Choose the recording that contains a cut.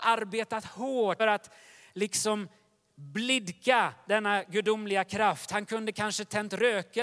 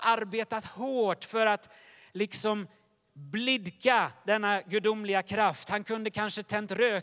first; 1 cut; at 1.2 s

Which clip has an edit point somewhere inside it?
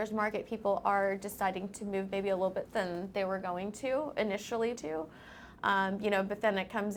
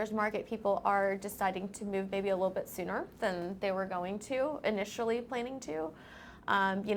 first; 2 cuts; at 2.7 s, 4.8 s

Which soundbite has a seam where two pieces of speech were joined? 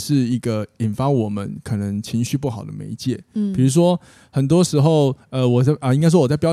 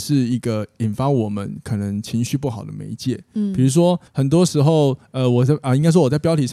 second; 1 cut; at 4.1 s

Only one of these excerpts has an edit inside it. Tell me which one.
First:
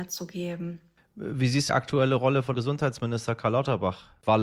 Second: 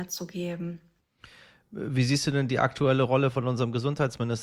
first; 3 cuts; at 1.0 s, 1.7 s, 2.5 s

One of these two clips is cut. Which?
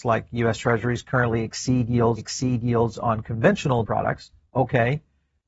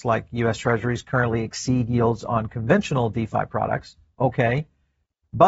first; 2 cuts; at 2.2 s, 3.8 s

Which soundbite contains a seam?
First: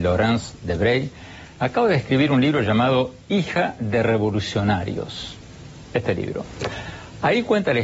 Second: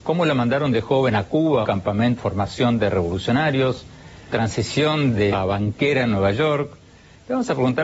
second; 4 cuts; at 1.6 s, 2.2 s, 4.3 s, 5.3 s

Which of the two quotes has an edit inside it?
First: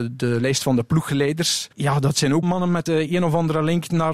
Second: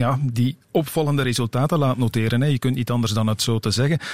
first; 3 cuts; at 1.7 s, 2.4 s, 2.9 s

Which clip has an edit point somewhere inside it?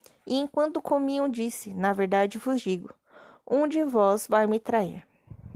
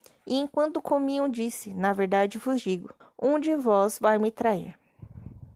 second; 1 cut; at 3.0 s

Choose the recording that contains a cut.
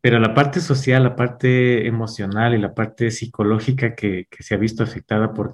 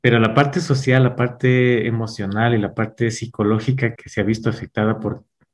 second; 1 cut; at 4.0 s

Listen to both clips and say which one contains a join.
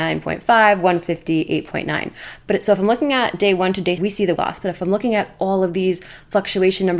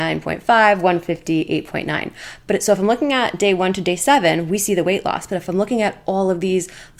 first; 2 cuts; at 4.0 s, 4.4 s

